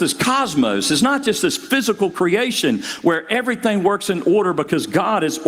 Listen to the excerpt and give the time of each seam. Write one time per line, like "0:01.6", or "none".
none